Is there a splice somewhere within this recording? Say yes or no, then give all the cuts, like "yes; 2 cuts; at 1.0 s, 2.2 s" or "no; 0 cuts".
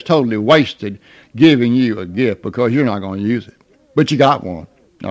no; 0 cuts